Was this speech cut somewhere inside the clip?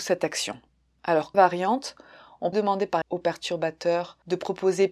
yes; 3 cuts; at 1.3 s, 2.5 s, 3.0 s

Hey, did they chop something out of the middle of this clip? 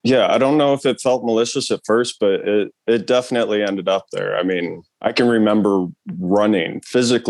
yes; 2 cuts; at 2.8 s, 4.9 s

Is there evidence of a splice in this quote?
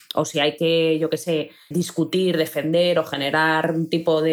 yes; 1 cut; at 1.7 s

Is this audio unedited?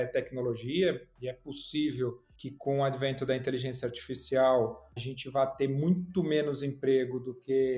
no; 1 cut; at 5.0 s

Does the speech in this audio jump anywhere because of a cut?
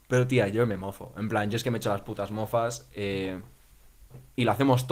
no; 0 cuts

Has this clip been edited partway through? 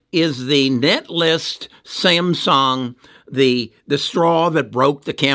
no; 0 cuts

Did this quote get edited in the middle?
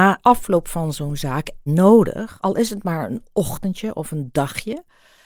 yes; 1 cut; at 1.7 s

